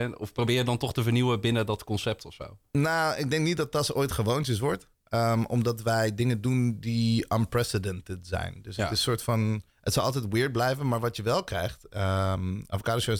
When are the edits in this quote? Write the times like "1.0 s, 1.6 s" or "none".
9.7 s